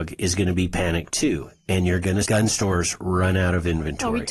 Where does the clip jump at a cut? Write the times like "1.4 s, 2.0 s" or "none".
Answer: 2.2 s